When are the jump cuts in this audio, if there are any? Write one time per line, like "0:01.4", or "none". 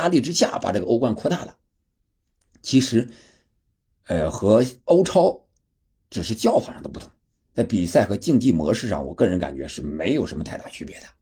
none